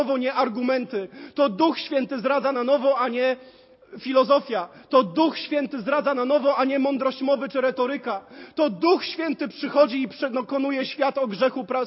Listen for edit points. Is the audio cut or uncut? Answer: uncut